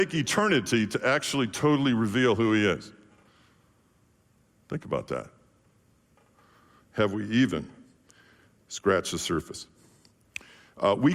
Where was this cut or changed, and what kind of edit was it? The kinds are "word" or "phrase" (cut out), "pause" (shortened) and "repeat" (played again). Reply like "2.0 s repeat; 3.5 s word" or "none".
none